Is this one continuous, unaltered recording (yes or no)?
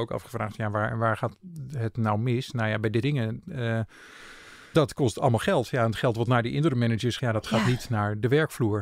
no